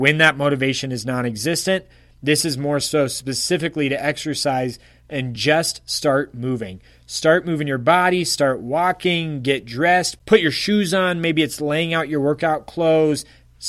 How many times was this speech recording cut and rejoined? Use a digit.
0